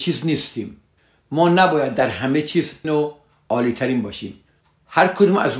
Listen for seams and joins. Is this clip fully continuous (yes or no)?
no